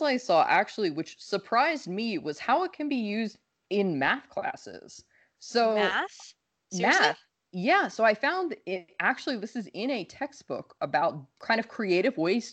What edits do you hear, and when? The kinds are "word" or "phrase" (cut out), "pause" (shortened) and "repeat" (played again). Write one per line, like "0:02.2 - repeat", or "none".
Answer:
none